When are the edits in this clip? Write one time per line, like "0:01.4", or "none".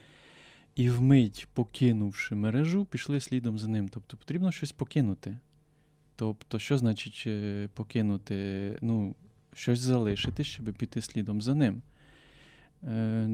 none